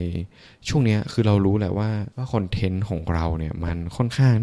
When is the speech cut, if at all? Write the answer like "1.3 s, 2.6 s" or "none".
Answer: 2.1 s